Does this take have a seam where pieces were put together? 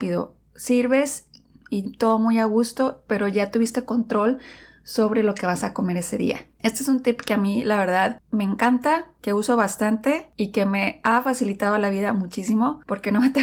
no; 0 cuts

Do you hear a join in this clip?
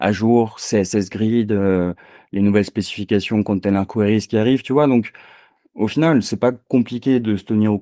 no; 0 cuts

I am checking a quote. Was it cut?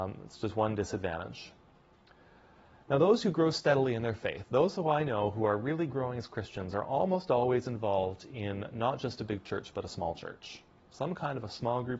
no; 0 cuts

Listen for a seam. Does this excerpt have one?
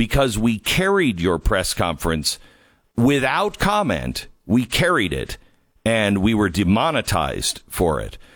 no; 0 cuts

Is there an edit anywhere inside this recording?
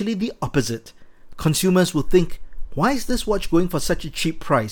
no; 0 cuts

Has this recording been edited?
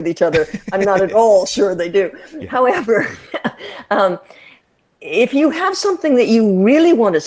no; 0 cuts

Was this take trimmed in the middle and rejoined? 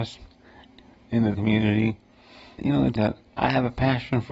yes; 4 cuts; at 1.3 s, 2.6 s, 3.0 s, 3.3 s

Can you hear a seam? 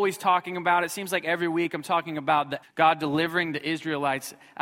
yes; 1 cut; at 2.6 s

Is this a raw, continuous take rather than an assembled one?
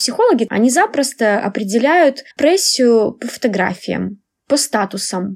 no; 1 cut; at 2.3 s

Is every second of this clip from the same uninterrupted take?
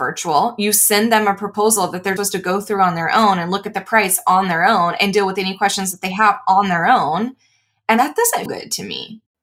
no; 2 cuts; at 2.2 s, 8.5 s

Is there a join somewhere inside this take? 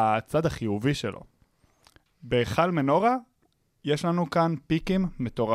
no; 0 cuts

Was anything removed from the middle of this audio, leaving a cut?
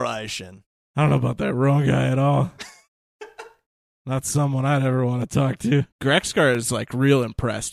yes; 1 cut; at 5.9 s

